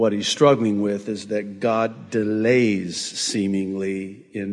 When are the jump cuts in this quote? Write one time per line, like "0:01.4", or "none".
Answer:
none